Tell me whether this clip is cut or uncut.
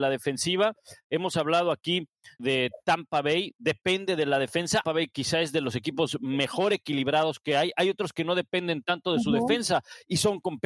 cut